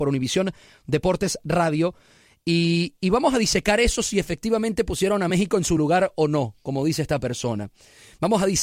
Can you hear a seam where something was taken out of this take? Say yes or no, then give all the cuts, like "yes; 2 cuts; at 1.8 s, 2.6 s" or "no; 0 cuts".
no; 0 cuts